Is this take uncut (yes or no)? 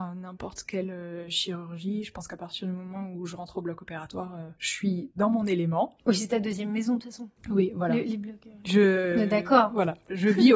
no